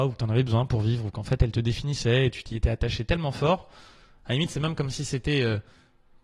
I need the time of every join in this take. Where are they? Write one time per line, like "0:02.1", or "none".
none